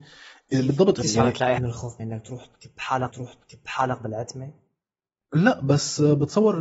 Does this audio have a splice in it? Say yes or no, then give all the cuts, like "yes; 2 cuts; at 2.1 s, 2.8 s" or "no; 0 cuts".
yes; 4 cuts; at 1.0 s, 1.6 s, 2.0 s, 3.1 s